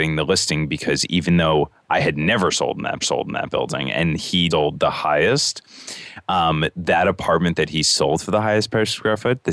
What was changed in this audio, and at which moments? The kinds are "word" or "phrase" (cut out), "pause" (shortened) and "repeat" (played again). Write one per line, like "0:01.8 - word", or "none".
0:03.0 - repeat
0:04.5 - word